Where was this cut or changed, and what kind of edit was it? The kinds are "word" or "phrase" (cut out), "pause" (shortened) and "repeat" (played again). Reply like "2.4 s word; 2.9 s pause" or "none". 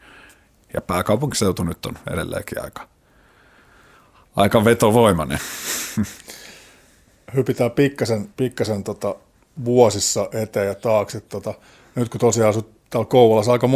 8.3 s pause